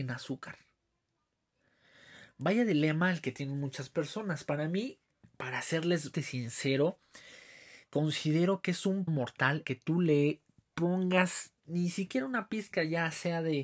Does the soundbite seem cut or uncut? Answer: cut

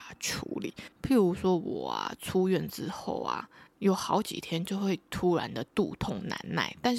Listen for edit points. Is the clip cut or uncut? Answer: cut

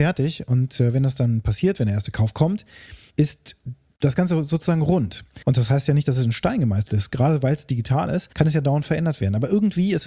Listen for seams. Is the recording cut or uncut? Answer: cut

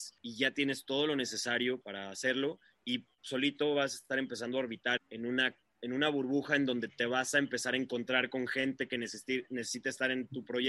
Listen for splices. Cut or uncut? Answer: cut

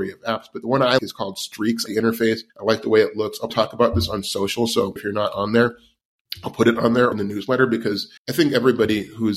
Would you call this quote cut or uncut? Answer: cut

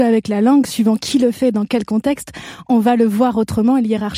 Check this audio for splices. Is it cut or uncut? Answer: uncut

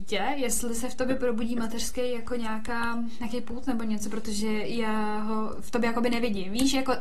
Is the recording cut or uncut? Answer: uncut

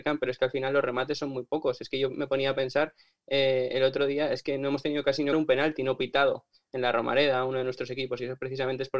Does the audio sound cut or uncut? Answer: cut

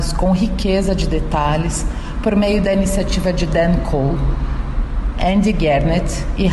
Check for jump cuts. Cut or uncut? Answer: uncut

